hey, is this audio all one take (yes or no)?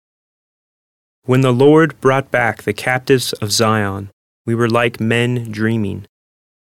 yes